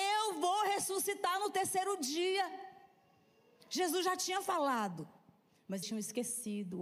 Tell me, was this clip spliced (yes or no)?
yes